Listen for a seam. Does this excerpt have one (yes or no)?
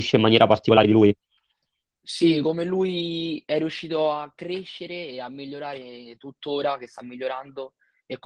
no